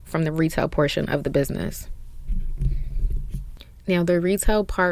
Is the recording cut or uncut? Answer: uncut